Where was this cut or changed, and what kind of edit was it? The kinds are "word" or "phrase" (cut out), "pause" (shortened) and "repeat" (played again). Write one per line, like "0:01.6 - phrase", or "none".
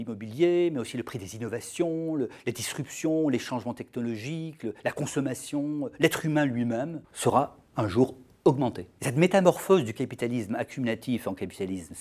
0:07.0 - pause